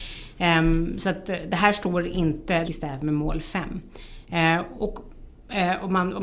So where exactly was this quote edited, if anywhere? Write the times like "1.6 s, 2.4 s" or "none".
2.6 s